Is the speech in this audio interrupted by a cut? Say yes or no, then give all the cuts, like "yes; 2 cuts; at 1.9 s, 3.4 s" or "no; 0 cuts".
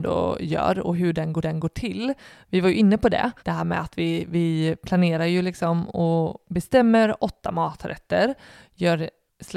yes; 2 cuts; at 1.4 s, 3.4 s